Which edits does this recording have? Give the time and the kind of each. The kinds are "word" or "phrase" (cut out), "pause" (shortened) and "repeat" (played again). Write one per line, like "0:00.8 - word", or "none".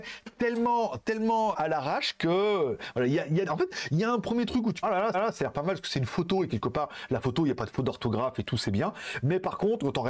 0:01.5 - word
0:03.5 - word
0:04.8 - phrase
0:05.1 - repeat